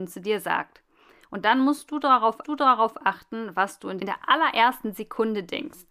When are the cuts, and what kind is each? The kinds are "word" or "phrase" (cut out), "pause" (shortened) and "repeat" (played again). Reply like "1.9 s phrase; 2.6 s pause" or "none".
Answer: 2.4 s repeat; 4.0 s phrase